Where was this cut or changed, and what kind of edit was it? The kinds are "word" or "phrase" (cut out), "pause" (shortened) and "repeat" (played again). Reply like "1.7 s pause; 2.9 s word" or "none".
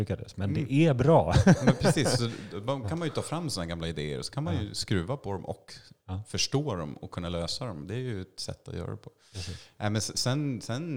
none

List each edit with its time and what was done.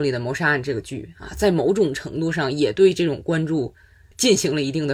none

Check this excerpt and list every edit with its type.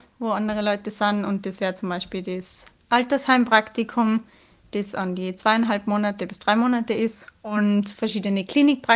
none

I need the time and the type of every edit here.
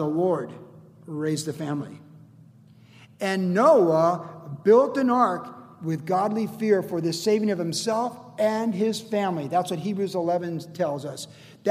none

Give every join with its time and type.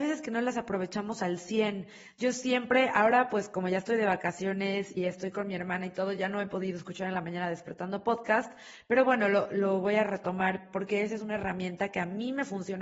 5.0 s word

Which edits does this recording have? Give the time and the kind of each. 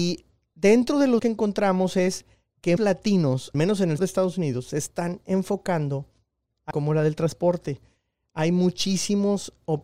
1.2 s word; 2.8 s word; 3.5 s word; 4.0 s word; 6.7 s word

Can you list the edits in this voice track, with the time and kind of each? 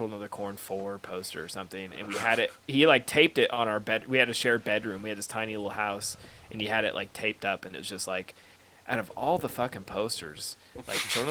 none

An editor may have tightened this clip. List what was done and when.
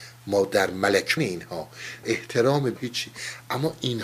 1.2 s word; 2.0 s word; 2.8 s word

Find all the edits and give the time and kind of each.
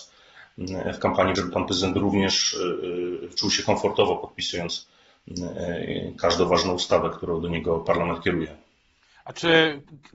1.4 s word

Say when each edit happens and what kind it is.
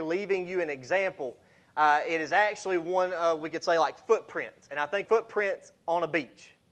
5.0 s word

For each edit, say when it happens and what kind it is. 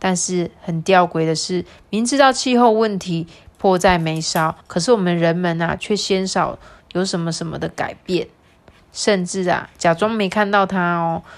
4.6 s pause

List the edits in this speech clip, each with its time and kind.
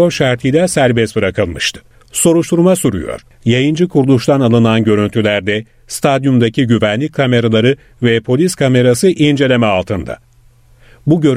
none

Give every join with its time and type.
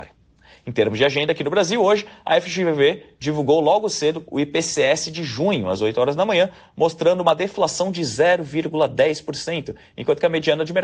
none

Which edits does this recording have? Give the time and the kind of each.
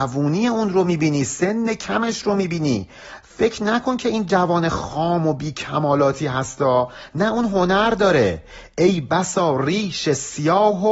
none

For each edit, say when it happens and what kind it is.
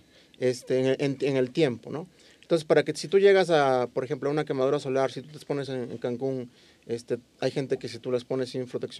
none

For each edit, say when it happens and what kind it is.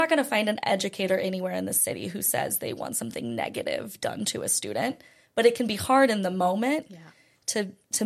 none

